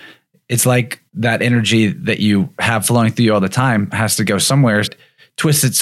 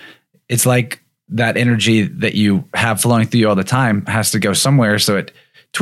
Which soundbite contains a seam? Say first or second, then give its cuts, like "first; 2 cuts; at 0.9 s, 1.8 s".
first; 2 cuts; at 1.1 s, 4.8 s